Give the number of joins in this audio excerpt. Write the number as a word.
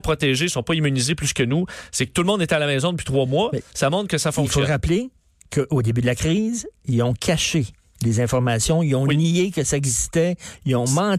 zero